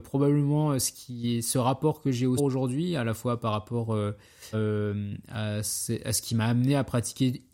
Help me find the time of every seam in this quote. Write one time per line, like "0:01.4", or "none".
0:02.4
0:04.5